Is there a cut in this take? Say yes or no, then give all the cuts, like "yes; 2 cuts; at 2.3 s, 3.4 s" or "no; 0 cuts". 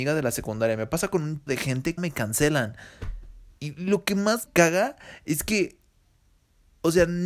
yes; 3 cuts; at 1.5 s, 2.0 s, 4.5 s